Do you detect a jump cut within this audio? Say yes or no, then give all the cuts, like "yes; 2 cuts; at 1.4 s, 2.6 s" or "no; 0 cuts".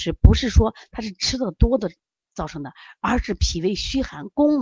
no; 0 cuts